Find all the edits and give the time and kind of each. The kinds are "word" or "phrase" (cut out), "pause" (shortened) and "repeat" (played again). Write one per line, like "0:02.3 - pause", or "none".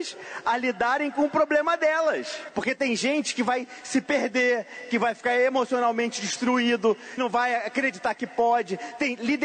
0:07.2 - word